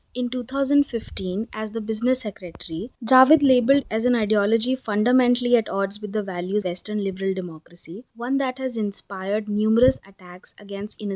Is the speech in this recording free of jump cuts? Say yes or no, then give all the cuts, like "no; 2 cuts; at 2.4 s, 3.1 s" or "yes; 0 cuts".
no; 4 cuts; at 2.9 s, 3.8 s, 6.6 s, 8.1 s